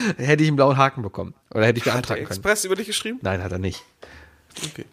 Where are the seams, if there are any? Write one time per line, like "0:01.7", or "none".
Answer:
none